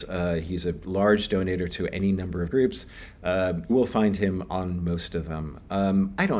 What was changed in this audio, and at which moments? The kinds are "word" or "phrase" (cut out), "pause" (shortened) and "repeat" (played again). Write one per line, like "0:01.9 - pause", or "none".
0:02.5 - word
0:03.7 - word